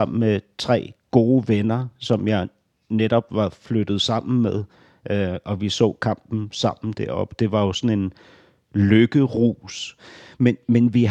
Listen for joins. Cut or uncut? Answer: uncut